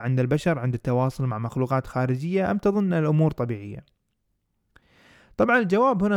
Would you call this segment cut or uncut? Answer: uncut